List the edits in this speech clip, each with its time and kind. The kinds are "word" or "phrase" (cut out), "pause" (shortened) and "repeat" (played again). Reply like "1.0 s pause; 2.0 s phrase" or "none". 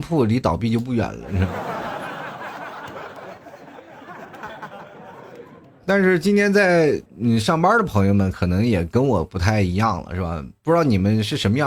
7.1 s pause